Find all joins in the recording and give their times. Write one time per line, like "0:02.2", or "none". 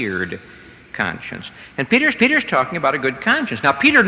0:02.2